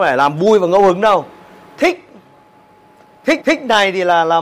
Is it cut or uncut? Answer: cut